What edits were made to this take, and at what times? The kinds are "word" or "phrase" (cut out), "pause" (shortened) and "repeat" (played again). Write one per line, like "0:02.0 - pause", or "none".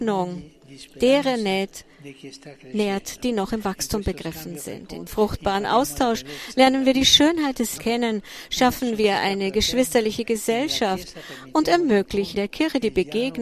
0:05.1 - word
0:07.8 - word
0:12.3 - word